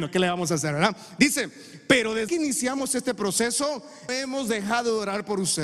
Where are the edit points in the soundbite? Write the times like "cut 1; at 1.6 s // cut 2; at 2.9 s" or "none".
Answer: cut 1; at 2.3 s // cut 2; at 4.1 s